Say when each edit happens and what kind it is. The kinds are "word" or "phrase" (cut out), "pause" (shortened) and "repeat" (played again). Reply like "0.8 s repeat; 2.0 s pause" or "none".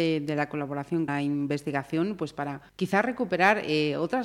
1.1 s word; 2.7 s pause